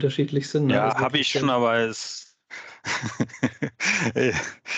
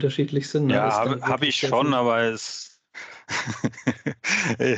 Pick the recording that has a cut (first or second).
first